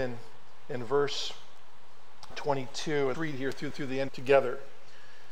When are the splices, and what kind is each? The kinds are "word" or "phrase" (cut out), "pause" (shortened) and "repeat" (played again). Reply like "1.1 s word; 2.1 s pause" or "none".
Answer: 2.3 s word; 3.1 s word; 3.7 s repeat; 4.1 s phrase